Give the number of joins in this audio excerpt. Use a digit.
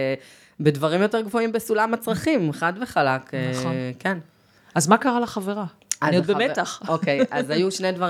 0